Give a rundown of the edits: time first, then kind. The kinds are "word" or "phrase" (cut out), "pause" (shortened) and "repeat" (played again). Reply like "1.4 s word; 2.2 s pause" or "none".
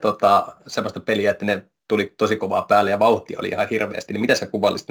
none